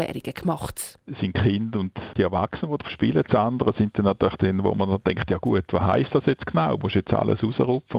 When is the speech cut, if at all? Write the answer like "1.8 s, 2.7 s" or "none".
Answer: 2.8 s